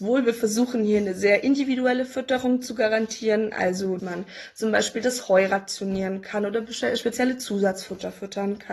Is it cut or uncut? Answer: cut